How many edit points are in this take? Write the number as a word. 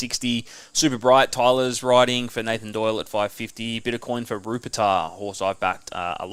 zero